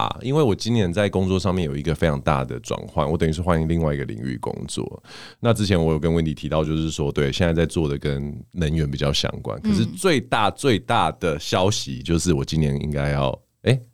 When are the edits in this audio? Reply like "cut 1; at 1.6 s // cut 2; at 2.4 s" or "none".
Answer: none

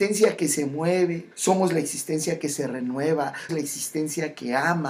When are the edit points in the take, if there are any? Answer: cut 1; at 1.3 s // cut 2; at 3.5 s

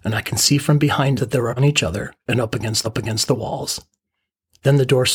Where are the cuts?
cut 1; at 1.2 s // cut 2; at 1.6 s // cut 3; at 2.8 s

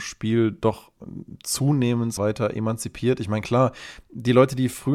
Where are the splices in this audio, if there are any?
cut 1; at 2.2 s

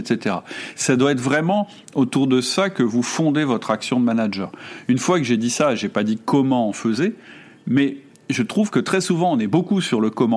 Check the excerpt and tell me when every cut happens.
none

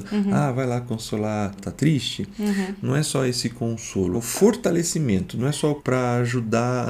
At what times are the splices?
cut 1; at 1.6 s // cut 2; at 4.1 s // cut 3; at 5.8 s

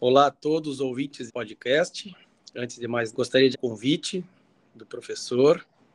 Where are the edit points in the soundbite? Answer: cut 1; at 1.3 s // cut 2; at 3.1 s // cut 3; at 3.5 s

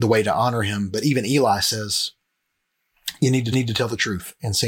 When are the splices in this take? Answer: cut 1; at 3.5 s

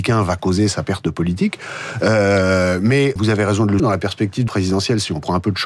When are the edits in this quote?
cut 1; at 3.2 s // cut 2; at 3.8 s // cut 3; at 4.5 s

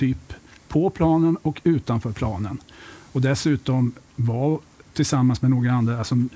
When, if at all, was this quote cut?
none

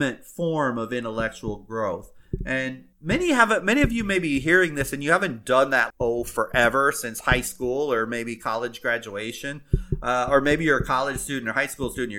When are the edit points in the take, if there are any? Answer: cut 1; at 2.9 s // cut 2; at 5.9 s

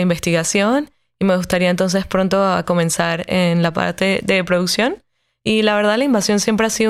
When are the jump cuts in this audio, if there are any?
none

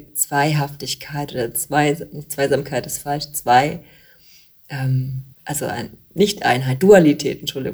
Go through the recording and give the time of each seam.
cut 1; at 5.3 s

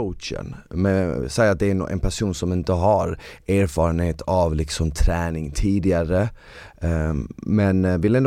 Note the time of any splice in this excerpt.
none

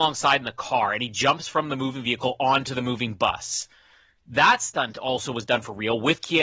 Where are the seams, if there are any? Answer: none

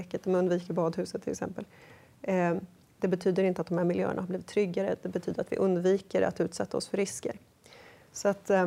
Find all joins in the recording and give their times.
none

